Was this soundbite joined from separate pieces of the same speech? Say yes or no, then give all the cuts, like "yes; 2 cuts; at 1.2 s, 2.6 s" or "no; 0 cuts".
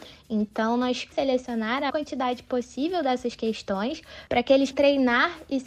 yes; 3 cuts; at 1.1 s, 1.9 s, 4.7 s